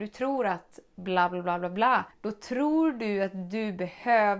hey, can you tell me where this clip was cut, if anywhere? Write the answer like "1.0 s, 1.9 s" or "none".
2.1 s